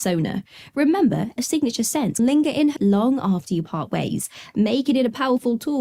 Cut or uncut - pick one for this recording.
cut